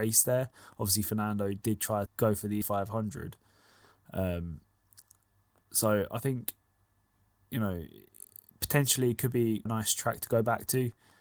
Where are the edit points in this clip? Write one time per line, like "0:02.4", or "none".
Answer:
0:02.1
0:02.6
0:09.7

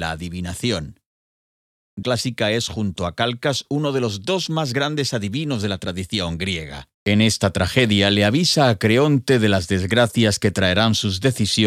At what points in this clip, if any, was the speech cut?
0:02.0
0:06.9

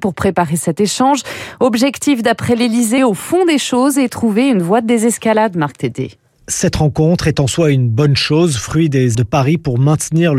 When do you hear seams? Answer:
0:03.0
0:09.1

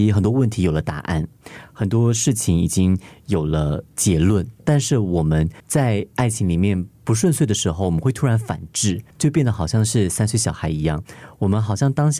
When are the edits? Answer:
0:04.6
0:05.6
0:09.1

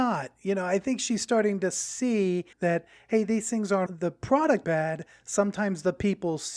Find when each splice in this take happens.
0:02.5
0:03.9
0:04.6

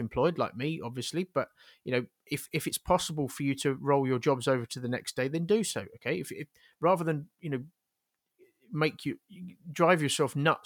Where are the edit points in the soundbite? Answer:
none

